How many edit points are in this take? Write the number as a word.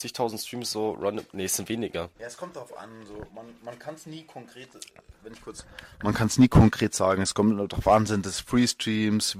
one